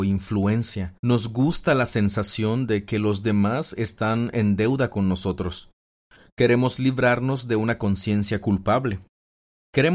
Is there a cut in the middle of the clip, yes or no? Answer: yes